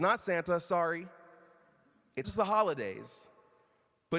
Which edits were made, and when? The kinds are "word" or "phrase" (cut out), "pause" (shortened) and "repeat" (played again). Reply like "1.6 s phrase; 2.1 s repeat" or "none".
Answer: 2.2 s word